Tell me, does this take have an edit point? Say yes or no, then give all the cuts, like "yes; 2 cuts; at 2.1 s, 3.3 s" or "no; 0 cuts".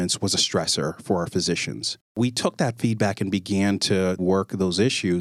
no; 0 cuts